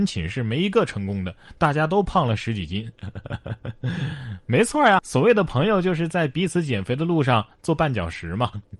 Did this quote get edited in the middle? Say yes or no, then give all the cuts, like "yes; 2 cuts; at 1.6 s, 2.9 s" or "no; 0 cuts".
yes; 1 cut; at 5.0 s